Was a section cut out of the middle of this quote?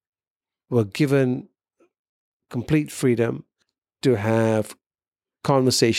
no; 0 cuts

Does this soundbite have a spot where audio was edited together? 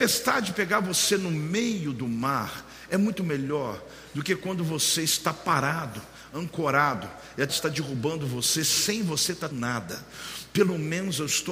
yes; 2 cuts; at 7.5 s, 9.5 s

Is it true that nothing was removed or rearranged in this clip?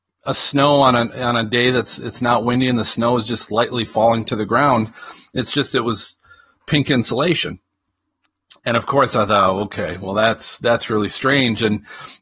yes; 0 cuts

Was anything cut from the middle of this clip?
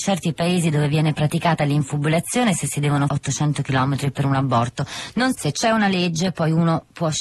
yes; 2 cuts; at 3.1 s, 5.3 s

